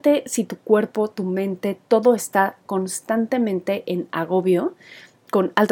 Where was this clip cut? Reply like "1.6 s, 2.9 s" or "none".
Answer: none